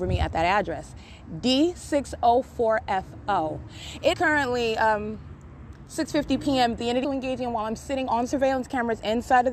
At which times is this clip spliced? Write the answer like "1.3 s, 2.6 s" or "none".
4.1 s, 7.0 s